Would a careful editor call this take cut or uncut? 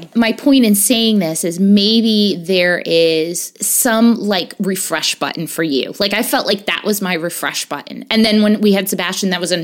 uncut